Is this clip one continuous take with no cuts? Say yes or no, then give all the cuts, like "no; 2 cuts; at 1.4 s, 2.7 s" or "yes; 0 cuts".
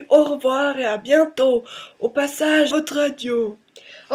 no; 1 cut; at 2.7 s